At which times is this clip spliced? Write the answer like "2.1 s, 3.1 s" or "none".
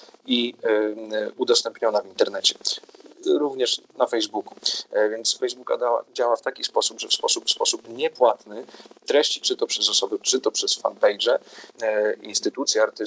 5.4 s, 7.4 s, 9.4 s, 10.2 s, 10.8 s